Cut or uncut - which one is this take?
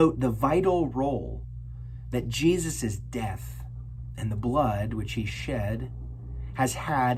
uncut